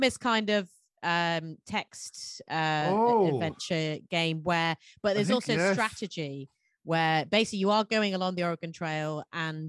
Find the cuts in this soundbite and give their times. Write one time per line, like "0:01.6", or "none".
none